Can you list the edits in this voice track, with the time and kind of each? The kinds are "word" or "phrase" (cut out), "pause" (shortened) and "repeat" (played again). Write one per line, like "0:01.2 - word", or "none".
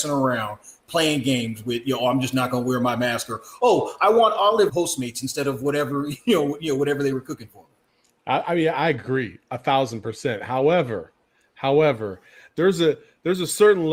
0:04.7 - word